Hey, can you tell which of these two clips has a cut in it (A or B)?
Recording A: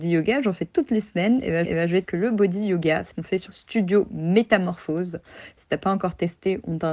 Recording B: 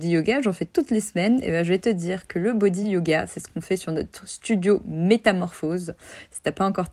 A